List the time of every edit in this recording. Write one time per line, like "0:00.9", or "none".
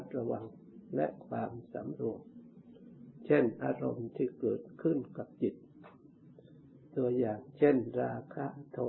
0:06.8